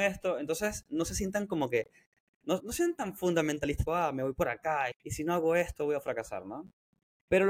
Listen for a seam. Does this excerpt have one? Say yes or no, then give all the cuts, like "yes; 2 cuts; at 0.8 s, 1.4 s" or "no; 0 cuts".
yes; 3 cuts; at 2.6 s, 3.9 s, 4.9 s